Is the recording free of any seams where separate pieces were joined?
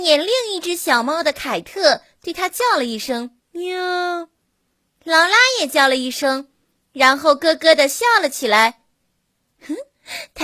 no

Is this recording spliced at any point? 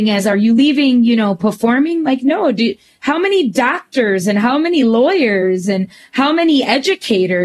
no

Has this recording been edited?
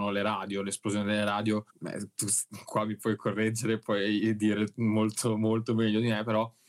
yes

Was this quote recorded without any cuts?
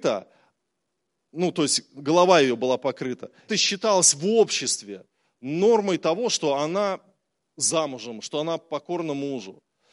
no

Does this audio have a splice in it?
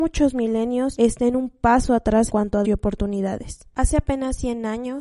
yes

